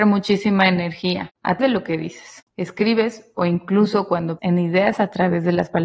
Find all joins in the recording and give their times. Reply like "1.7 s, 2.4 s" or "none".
1.6 s, 4.4 s